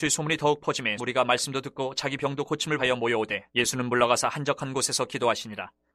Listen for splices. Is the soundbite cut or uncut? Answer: cut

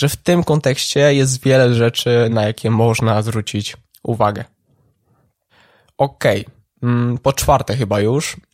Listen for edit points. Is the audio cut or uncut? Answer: uncut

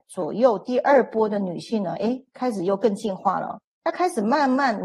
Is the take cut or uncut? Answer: cut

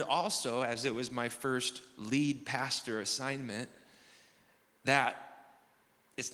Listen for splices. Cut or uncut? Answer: uncut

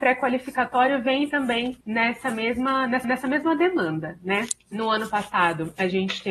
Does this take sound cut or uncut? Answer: cut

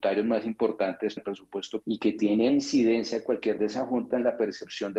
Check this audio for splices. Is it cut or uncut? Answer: cut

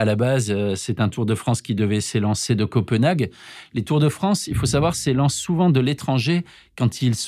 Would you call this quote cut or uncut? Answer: uncut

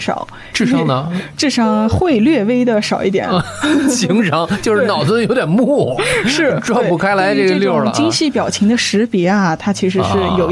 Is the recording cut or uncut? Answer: uncut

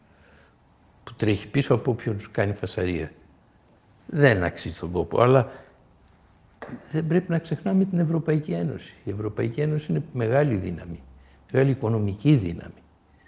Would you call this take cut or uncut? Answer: uncut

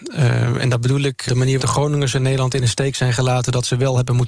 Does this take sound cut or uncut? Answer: cut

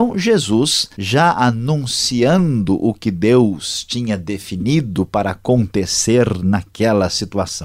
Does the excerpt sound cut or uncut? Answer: cut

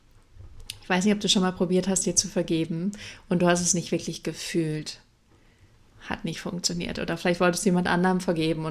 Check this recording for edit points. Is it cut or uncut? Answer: uncut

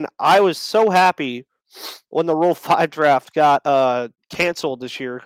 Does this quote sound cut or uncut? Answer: uncut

